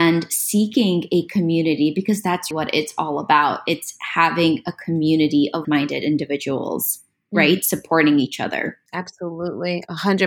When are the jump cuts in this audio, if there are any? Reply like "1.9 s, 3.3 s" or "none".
2.5 s, 5.6 s, 8.9 s